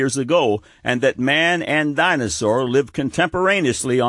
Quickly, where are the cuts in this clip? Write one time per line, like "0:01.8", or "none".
none